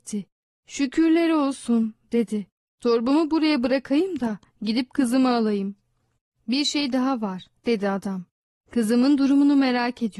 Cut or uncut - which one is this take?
uncut